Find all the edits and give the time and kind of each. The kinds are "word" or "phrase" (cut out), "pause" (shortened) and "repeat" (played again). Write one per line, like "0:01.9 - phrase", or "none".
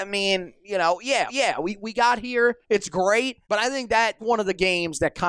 0:01.3 - repeat
0:02.6 - pause
0:03.4 - pause
0:04.2 - word